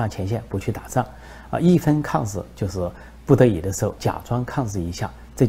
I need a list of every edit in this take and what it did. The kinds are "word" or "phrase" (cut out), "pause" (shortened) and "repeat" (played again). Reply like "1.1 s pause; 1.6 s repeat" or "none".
4.0 s word